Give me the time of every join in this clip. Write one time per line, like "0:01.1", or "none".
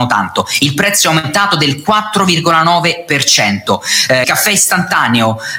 0:04.2